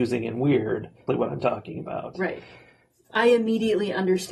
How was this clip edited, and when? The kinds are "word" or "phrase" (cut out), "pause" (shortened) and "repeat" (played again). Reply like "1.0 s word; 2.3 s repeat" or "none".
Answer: 1.1 s phrase

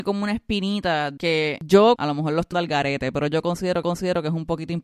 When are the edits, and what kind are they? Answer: 1.2 s word; 2.0 s word; 2.5 s word; 3.8 s repeat

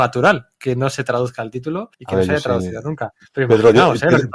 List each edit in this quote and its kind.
1.9 s pause

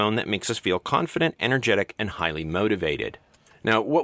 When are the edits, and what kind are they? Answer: none

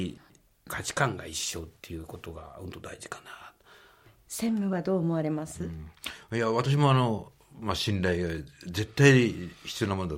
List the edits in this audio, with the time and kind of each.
none

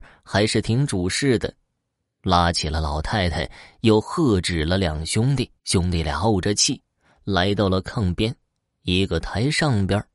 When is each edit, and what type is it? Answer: 5.6 s pause

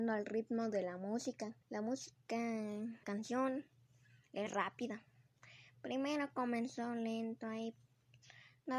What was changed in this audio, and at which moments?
1.6 s pause; 3.0 s word; 4.5 s word

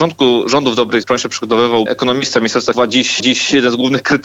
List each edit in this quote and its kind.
1.0 s word; 1.9 s phrase; 2.7 s word; 3.2 s repeat

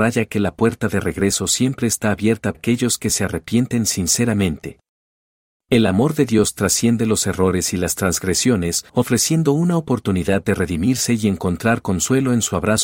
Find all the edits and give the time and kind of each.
2.5 s word; 8.9 s pause

